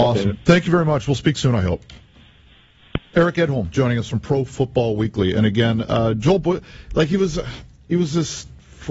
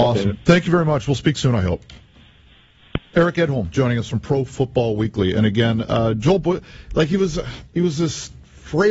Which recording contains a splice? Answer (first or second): second